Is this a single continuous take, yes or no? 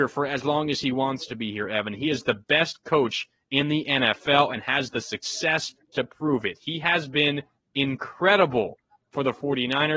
yes